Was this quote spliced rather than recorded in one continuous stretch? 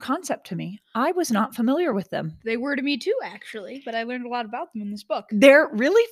no; 0 cuts

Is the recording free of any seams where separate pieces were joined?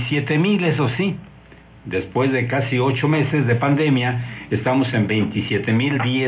yes; 0 cuts

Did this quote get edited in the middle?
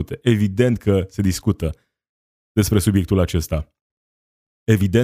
no; 0 cuts

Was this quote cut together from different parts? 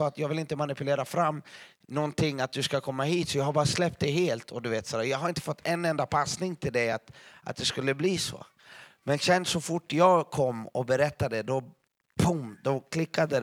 no; 0 cuts

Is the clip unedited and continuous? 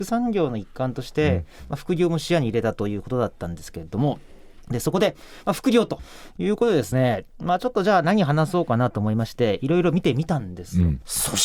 yes; 0 cuts

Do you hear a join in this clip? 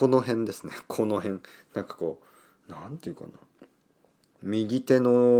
no; 0 cuts

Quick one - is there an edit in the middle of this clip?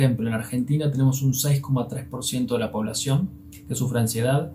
no; 0 cuts

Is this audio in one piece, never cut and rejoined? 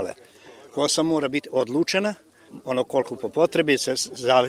yes; 0 cuts

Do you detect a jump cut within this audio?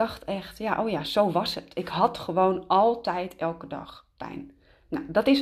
no; 0 cuts

